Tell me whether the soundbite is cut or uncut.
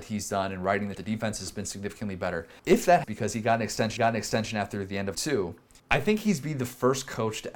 cut